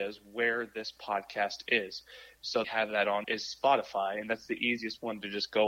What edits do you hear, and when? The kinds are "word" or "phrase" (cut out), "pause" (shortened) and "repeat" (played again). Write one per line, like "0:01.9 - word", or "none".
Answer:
0:02.6 - phrase
0:03.2 - word